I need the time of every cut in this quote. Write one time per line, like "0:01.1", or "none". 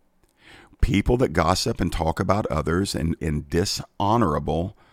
0:03.2